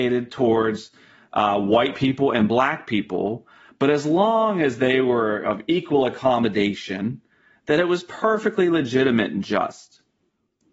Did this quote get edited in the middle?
no; 0 cuts

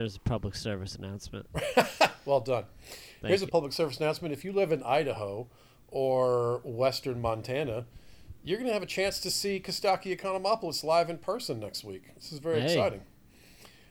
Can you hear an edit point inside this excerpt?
yes; 1 cut; at 3.5 s

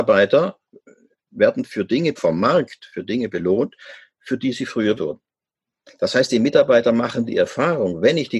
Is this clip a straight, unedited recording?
no; 2 cuts; at 2.2 s, 5.0 s

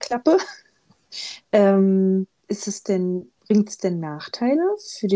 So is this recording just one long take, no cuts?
no; 2 cuts; at 2.4 s, 3.4 s

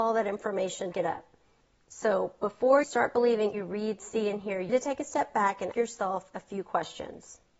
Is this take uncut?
no; 6 cuts; at 0.9 s, 1.6 s, 2.8 s, 3.5 s, 4.7 s, 5.7 s

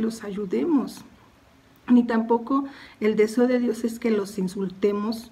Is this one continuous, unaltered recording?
yes; 0 cuts

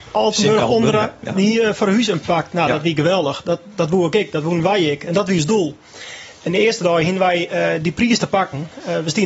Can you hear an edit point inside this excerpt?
yes; 1 cut; at 2.2 s

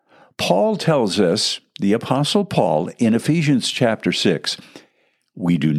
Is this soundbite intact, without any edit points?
yes; 0 cuts

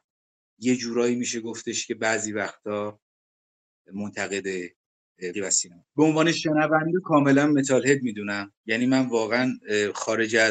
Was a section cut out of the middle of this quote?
yes; 3 cuts; at 5.3 s, 5.8 s, 7.0 s

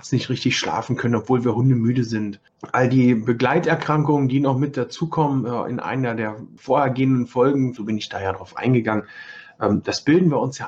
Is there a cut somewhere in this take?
no; 0 cuts

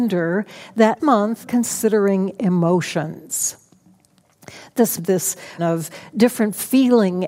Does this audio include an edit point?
yes; 4 cuts; at 1.0 s, 1.4 s, 5.0 s, 5.6 s

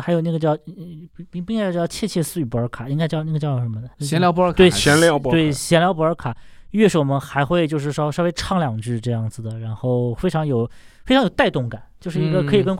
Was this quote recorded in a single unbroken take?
no; 1 cut; at 3.9 s

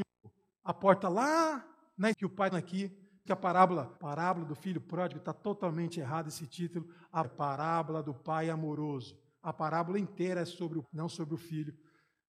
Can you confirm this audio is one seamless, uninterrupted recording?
no; 6 cuts; at 2.1 s, 2.5 s, 3.3 s, 4.0 s, 7.2 s, 10.8 s

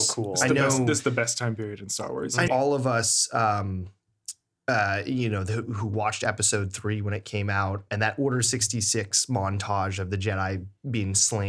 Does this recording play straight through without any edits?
no; 2 cuts; at 2.5 s, 7.9 s

